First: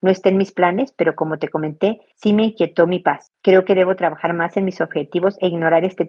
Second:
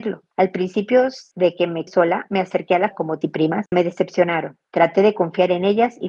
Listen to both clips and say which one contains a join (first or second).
second